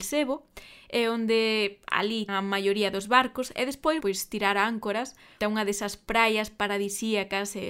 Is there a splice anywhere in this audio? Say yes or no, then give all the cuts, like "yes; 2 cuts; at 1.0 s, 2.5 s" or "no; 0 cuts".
yes; 3 cuts; at 2.3 s, 4.0 s, 5.4 s